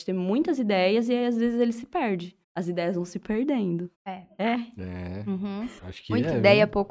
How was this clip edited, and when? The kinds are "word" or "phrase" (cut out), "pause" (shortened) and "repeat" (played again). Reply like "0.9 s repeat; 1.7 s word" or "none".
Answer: 2.4 s pause; 3.9 s pause; 5.8 s pause